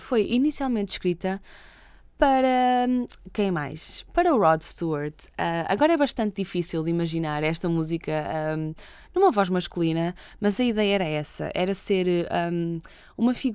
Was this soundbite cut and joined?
no; 0 cuts

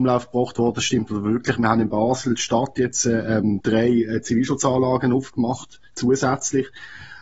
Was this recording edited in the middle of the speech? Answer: no; 0 cuts

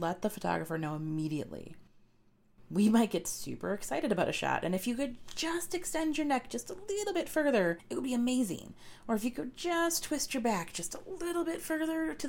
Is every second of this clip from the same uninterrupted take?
yes; 0 cuts

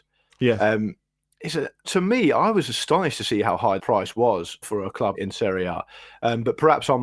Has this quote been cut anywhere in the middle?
yes; 4 cuts; at 1.8 s, 3.8 s, 4.6 s, 5.1 s

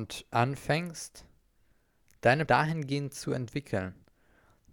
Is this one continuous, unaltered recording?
no; 1 cut; at 2.5 s

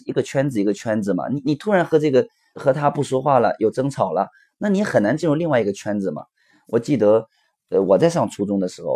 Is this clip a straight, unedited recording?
no; 1 cut; at 2.6 s

